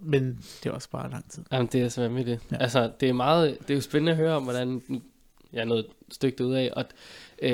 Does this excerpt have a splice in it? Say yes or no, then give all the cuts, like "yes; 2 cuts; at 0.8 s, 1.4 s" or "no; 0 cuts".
no; 0 cuts